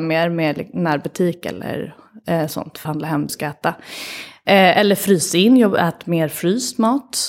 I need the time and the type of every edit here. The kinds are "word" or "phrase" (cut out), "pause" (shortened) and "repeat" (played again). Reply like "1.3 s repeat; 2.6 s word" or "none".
2.8 s word; 3.3 s word